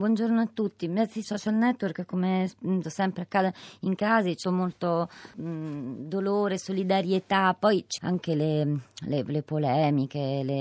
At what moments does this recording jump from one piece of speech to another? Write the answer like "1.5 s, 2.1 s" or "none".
1.2 s, 2.8 s, 4.0 s, 4.4 s, 5.3 s, 8.0 s